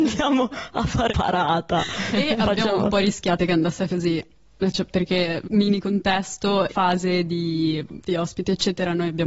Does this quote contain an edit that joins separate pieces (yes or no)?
yes